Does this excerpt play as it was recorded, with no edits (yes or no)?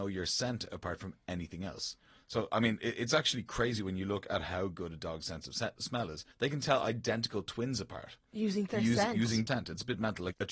no